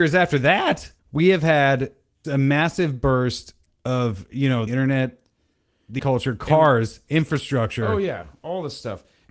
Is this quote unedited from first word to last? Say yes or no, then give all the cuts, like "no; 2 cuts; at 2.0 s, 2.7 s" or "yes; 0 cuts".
no; 5 cuts; at 1.0 s, 2.2 s, 3.6 s, 4.7 s, 6.0 s